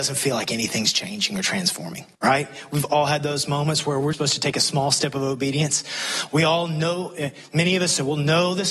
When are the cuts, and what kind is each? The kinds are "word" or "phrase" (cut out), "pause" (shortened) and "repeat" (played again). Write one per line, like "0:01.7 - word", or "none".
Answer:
0:02.1 - pause
0:04.1 - word